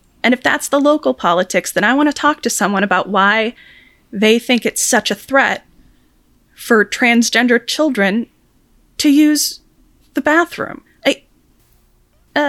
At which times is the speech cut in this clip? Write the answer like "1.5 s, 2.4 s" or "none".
none

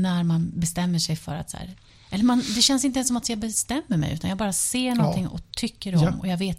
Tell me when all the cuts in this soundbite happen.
none

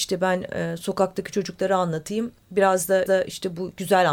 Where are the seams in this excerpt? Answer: 2.4 s, 3.1 s

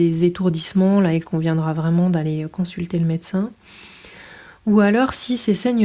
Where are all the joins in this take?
none

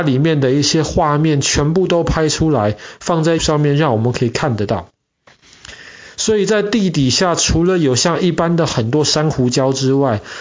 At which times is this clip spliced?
3.4 s

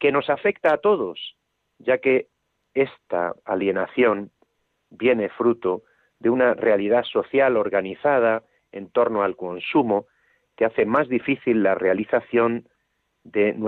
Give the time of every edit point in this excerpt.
none

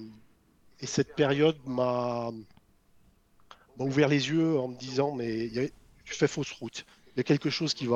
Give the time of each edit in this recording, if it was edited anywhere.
none

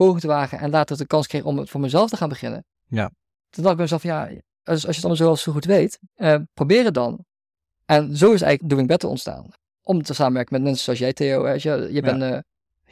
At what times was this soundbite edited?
6.1 s

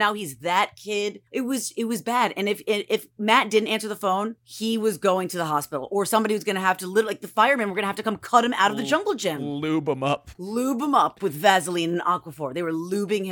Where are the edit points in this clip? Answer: 1.3 s, 4.4 s, 10.3 s

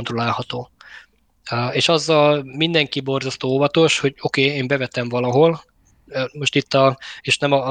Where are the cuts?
none

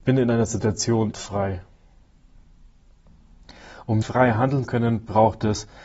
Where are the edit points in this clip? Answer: 1.1 s, 4.0 s, 4.6 s

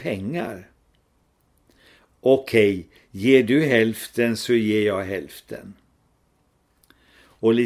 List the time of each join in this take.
none

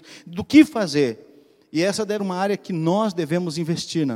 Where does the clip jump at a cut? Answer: 2.2 s

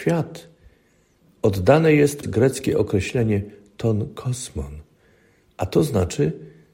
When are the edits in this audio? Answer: 2.2 s

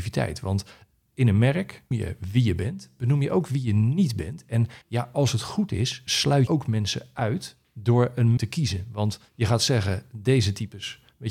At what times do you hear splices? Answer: 1.9 s, 4.8 s, 6.5 s, 8.4 s, 9.3 s

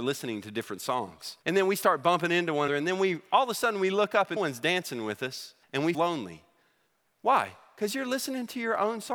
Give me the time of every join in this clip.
1.4 s, 2.7 s, 4.4 s, 5.6 s, 5.9 s

